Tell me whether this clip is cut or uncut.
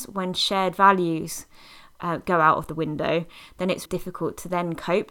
cut